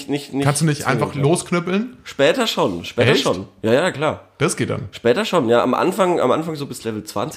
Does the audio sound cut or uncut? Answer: uncut